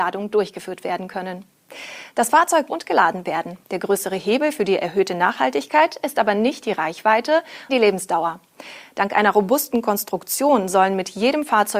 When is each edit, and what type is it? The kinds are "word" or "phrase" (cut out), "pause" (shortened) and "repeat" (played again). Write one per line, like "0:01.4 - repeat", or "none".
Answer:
0:02.7 - phrase
0:03.6 - pause
0:07.7 - word

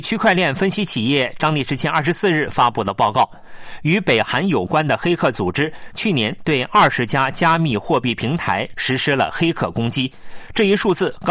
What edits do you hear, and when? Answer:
0:01.4 - word

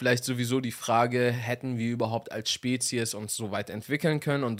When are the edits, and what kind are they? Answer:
none

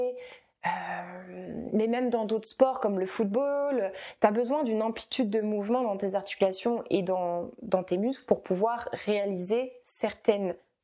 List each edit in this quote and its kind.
none

